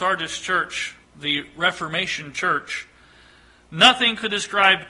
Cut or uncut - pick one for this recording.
cut